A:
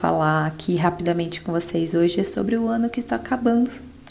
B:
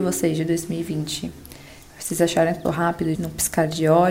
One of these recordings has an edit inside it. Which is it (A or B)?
B